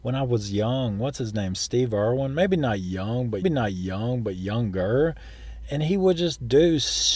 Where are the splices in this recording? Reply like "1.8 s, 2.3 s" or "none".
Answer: 3.4 s